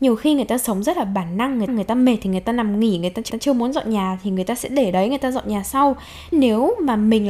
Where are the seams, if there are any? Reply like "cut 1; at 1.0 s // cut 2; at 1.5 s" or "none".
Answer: cut 1; at 1.7 s // cut 2; at 3.3 s // cut 3; at 6.3 s